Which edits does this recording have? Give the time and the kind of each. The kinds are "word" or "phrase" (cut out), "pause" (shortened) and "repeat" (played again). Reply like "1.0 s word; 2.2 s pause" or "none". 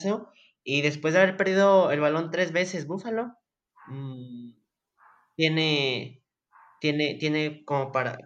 none